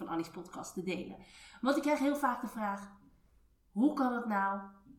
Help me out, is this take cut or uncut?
uncut